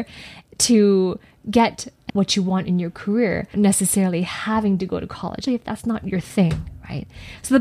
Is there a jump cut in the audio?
yes; 3 cuts; at 2.1 s, 3.5 s, 5.5 s

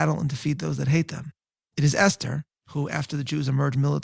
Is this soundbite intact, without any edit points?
yes; 0 cuts

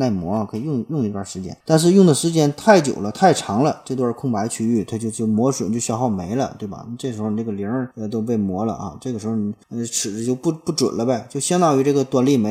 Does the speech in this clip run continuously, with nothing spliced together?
no; 3 cuts; at 1.6 s, 7.9 s, 9.6 s

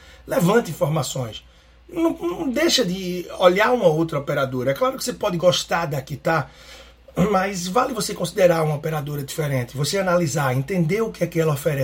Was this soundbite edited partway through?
no; 0 cuts

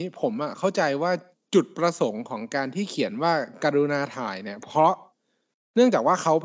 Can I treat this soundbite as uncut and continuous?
yes; 0 cuts

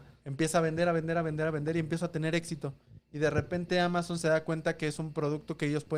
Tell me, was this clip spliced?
no; 0 cuts

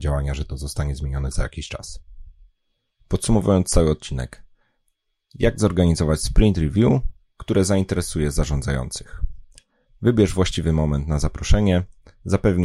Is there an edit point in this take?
no; 0 cuts

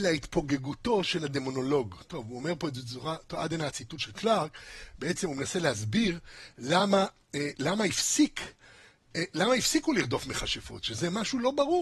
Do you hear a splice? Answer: no; 0 cuts

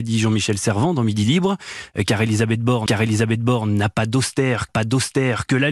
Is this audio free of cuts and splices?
no; 2 cuts; at 2.9 s, 4.7 s

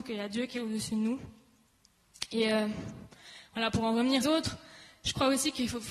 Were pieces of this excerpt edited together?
yes; 1 cut; at 4.2 s

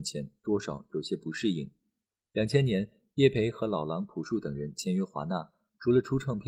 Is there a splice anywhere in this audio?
no; 0 cuts

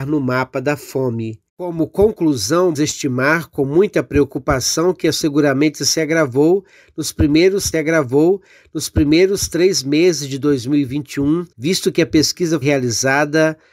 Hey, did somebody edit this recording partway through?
yes; 6 cuts; at 1.5 s, 2.8 s, 5.1 s, 7.7 s, 11.5 s, 12.6 s

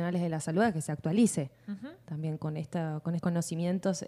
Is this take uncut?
no; 2 cuts; at 2.4 s, 3.2 s

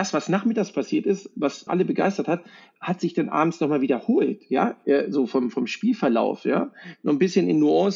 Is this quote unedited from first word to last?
no; 1 cut; at 1.7 s

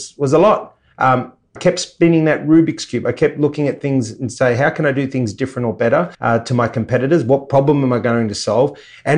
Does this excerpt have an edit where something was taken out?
yes; 2 cuts; at 1.6 s, 6.1 s

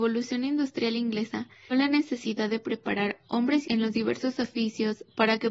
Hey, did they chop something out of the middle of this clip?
yes; 2 cuts; at 1.7 s, 3.6 s

